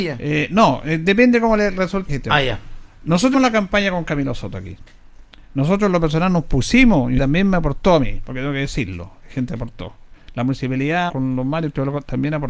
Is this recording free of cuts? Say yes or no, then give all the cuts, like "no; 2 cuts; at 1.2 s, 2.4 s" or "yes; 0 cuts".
no; 4 cuts; at 2.1 s, 3.3 s, 7.2 s, 11.1 s